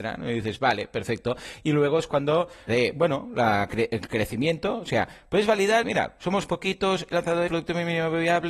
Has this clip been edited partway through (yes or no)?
yes